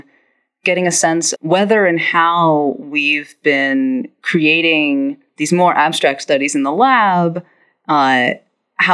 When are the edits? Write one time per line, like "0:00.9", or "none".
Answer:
0:01.4